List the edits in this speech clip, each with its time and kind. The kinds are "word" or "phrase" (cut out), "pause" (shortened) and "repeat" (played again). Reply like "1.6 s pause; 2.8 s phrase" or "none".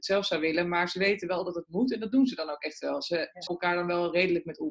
3.5 s word